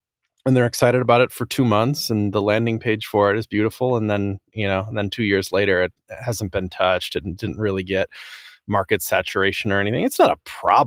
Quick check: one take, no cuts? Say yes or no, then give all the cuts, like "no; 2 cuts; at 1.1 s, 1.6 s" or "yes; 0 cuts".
yes; 0 cuts